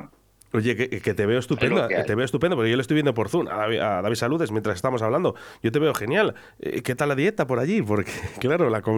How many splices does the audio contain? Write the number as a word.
zero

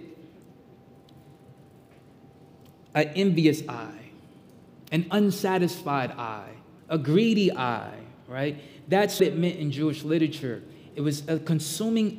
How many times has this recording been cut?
two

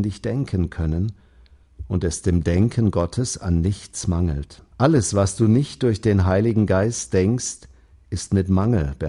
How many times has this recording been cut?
one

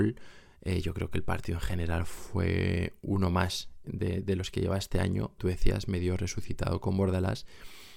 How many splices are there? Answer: two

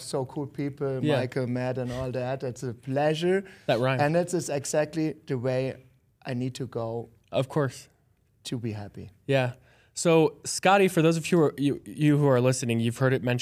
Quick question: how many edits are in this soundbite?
zero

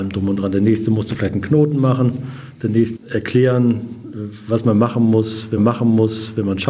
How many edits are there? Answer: two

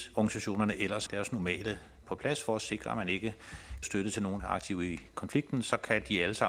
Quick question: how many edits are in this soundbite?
four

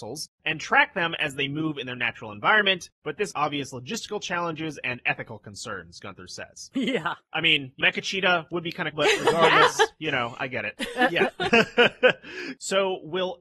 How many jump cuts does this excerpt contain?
three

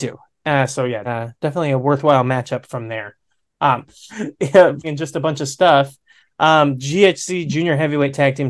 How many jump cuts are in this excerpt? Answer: four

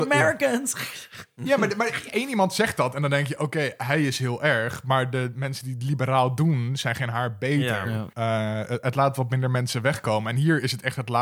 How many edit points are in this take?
one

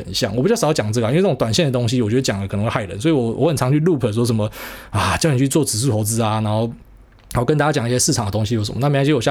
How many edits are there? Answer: zero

